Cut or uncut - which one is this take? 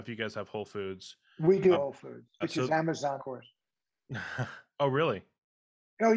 cut